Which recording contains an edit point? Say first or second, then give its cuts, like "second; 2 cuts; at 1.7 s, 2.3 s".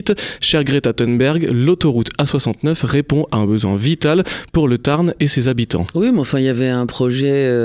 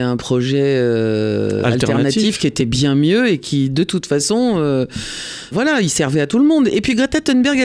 second; 1 cut; at 5.5 s